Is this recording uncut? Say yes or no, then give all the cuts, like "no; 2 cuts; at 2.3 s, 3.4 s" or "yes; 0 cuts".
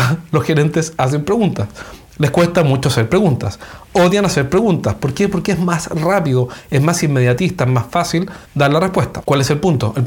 no; 1 cut; at 8.5 s